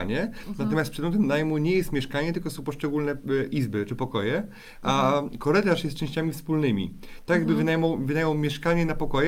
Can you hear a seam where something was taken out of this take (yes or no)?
no